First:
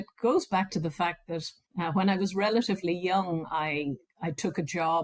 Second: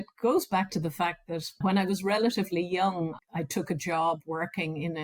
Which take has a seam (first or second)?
second